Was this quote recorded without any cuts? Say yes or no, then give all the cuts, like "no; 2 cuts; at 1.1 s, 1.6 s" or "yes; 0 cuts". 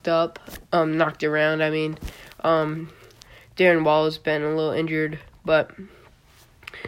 yes; 0 cuts